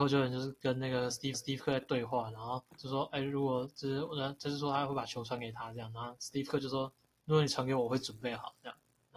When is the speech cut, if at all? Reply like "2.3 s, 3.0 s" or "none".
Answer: 1.3 s, 7.0 s